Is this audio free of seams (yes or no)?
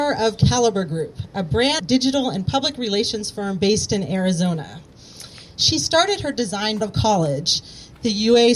no